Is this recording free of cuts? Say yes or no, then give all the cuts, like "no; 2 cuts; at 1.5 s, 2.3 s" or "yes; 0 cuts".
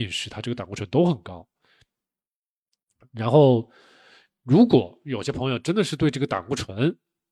yes; 0 cuts